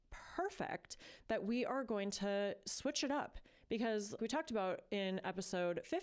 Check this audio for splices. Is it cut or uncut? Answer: cut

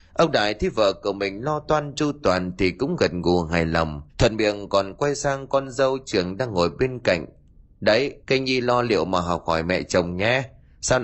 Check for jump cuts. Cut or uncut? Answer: cut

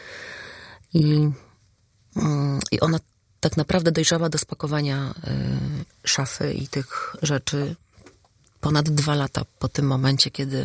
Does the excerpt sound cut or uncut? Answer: uncut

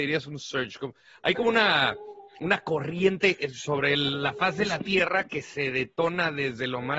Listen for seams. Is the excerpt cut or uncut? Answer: uncut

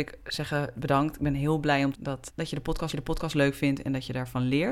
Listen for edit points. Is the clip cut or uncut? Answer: cut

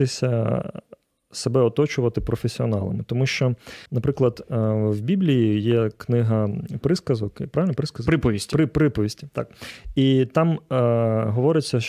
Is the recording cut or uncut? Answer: cut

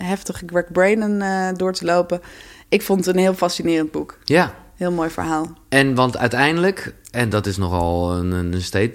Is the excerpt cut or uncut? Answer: uncut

